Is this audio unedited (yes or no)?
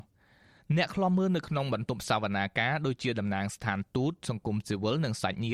yes